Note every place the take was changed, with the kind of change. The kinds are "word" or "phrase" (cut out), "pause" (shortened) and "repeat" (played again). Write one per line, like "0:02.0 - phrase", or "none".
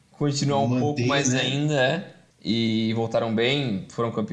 0:02.3 - pause